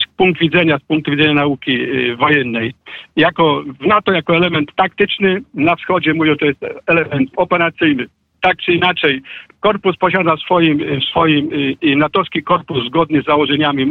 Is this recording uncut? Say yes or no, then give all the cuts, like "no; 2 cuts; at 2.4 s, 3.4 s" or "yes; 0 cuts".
yes; 0 cuts